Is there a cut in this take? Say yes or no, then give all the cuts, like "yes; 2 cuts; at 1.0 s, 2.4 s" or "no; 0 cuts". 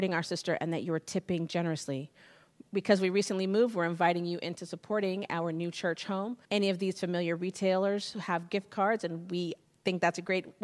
yes; 2 cuts; at 6.4 s, 9.6 s